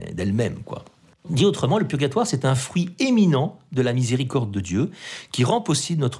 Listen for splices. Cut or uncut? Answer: uncut